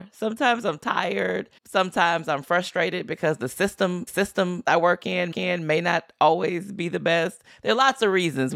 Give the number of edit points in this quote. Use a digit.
3